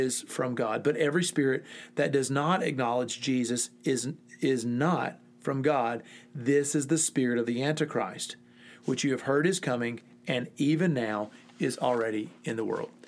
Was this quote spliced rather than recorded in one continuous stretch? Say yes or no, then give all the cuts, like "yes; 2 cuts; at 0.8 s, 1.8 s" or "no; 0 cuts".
no; 0 cuts